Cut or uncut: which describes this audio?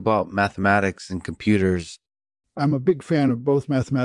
uncut